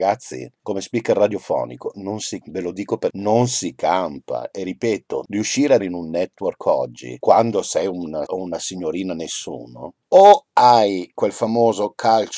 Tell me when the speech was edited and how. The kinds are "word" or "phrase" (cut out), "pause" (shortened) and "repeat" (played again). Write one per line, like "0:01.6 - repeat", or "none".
0:02.4 - word
0:03.1 - word
0:05.8 - word
0:08.3 - word